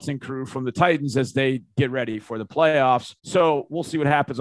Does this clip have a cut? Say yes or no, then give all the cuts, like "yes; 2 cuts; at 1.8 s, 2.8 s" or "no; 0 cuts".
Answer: yes; 1 cut; at 3.2 s